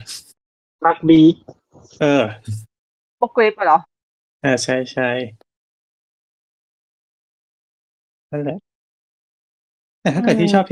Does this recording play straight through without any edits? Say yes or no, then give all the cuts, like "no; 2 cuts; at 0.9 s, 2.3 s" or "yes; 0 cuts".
yes; 0 cuts